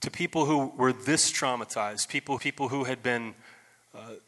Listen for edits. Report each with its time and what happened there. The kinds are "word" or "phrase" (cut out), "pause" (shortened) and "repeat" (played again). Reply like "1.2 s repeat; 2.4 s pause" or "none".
2.4 s repeat